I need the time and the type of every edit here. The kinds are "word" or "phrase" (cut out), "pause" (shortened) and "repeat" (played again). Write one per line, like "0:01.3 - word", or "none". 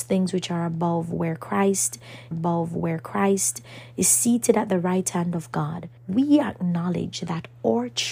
0:02.3 - repeat
0:06.0 - pause